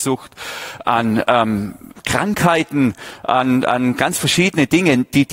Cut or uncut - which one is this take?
uncut